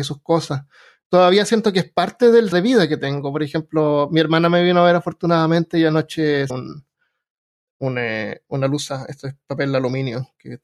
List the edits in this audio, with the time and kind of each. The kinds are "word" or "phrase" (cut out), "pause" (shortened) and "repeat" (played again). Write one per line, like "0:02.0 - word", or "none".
0:02.5 - word
0:06.5 - word